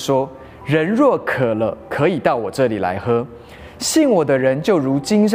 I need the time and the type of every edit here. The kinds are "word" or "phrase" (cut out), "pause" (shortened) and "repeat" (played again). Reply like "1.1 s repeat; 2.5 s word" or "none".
none